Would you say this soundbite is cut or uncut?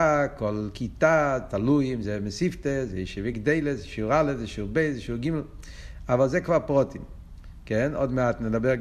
uncut